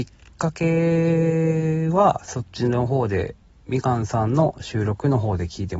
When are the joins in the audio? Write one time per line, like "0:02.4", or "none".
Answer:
none